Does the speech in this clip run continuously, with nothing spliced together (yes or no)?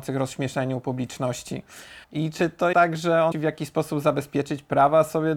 no